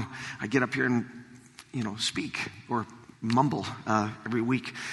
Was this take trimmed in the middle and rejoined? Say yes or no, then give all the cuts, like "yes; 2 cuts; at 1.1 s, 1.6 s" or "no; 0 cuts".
yes; 1 cut; at 3.1 s